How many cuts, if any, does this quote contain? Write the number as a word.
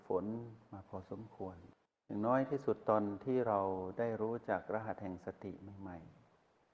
one